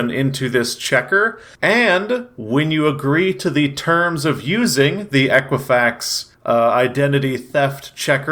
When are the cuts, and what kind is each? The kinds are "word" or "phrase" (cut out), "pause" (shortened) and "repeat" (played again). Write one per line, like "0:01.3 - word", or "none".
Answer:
none